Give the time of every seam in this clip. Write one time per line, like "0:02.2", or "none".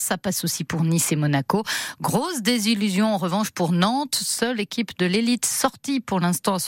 none